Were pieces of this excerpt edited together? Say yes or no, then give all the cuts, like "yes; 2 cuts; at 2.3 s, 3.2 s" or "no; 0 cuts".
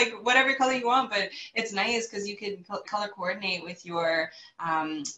yes; 1 cut; at 2.8 s